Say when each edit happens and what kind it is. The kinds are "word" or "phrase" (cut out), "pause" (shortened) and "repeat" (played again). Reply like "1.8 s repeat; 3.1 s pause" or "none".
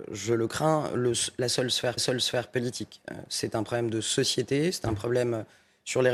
2.0 s repeat